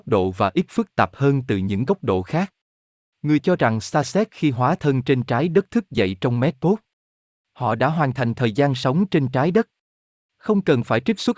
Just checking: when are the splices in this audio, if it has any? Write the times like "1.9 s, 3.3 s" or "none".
3.4 s